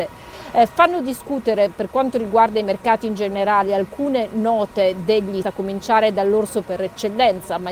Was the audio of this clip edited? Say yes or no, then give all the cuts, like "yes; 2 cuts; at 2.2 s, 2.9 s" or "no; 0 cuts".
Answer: yes; 1 cut; at 5.4 s